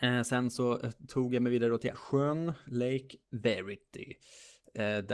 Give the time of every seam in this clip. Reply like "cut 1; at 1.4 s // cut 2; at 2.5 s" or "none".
cut 1; at 1.9 s // cut 2; at 3.2 s